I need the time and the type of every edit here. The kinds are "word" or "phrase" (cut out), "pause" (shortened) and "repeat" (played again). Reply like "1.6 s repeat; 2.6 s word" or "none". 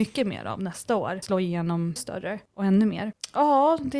1.2 s phrase; 2.0 s word